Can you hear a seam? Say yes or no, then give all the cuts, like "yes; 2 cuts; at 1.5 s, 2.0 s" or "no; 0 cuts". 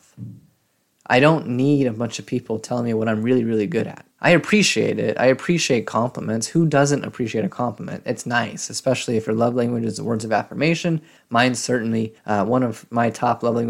yes; 3 cuts; at 4.1 s, 11.2 s, 12.2 s